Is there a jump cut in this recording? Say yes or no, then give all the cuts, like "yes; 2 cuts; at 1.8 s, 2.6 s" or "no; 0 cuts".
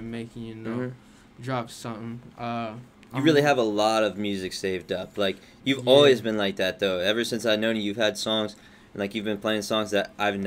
no; 0 cuts